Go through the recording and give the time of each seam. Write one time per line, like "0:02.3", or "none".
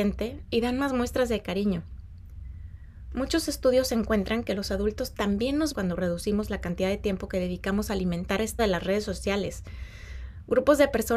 0:05.7
0:08.6